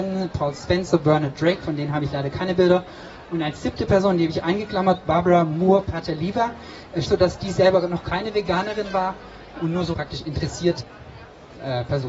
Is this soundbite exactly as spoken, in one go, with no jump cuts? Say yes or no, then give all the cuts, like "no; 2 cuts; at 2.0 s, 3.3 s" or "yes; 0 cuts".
no; 3 cuts; at 7.0 s, 9.9 s, 10.8 s